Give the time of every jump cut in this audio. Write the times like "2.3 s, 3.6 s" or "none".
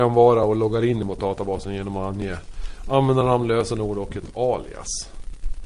none

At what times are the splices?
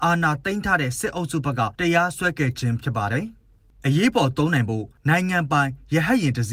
1.7 s

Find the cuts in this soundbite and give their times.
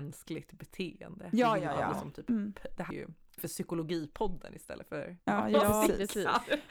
2.9 s, 3.4 s, 5.2 s

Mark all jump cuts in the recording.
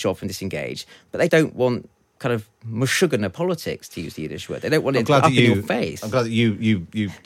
1.3 s

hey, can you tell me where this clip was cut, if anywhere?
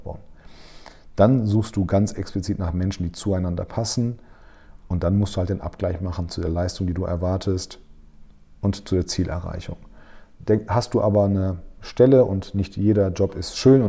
none

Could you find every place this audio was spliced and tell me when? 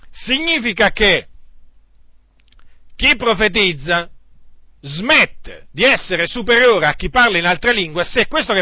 4.8 s

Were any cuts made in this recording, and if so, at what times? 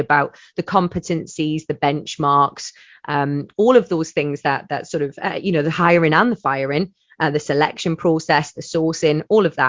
none

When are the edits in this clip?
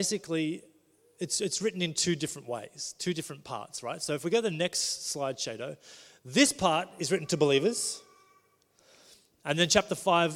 none

